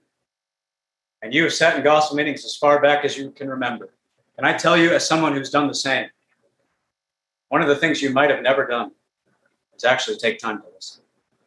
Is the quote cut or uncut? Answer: uncut